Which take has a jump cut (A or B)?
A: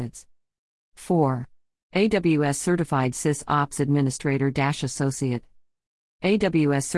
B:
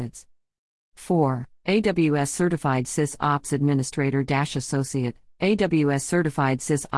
B